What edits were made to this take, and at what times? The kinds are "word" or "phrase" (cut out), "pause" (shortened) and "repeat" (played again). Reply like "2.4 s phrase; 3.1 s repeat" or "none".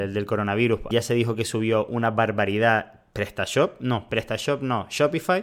0.9 s phrase